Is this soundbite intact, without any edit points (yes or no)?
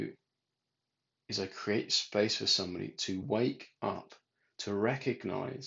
yes